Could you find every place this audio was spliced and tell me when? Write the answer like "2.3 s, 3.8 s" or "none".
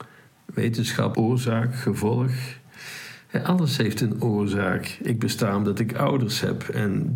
1.1 s